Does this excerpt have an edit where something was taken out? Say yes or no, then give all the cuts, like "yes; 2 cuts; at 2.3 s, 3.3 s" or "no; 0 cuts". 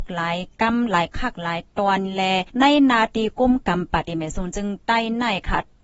yes; 1 cut; at 2.5 s